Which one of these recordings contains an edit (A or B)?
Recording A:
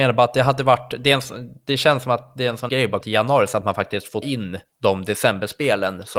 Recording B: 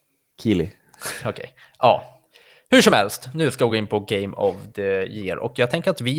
A